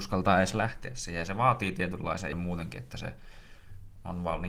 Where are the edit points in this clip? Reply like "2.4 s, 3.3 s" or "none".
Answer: 2.3 s